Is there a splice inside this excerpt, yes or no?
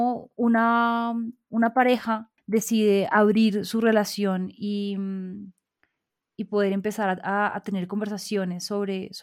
no